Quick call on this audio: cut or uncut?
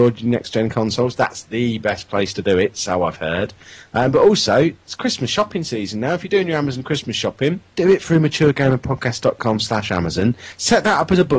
cut